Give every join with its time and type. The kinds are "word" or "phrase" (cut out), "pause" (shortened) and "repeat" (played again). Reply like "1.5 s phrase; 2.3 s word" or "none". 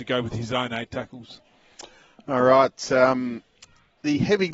none